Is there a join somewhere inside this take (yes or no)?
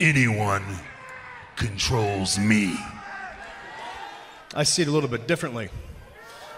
no